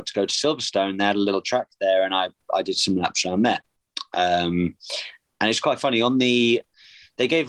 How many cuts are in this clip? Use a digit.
0